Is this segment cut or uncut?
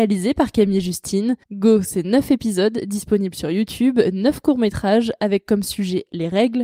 cut